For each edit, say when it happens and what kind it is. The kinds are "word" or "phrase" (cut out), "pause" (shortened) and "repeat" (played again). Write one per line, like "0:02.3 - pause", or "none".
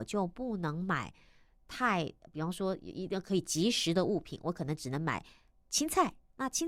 none